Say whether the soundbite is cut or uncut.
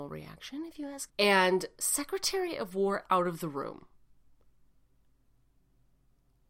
cut